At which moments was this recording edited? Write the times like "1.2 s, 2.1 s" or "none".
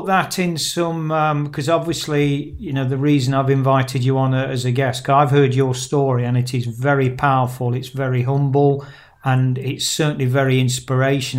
none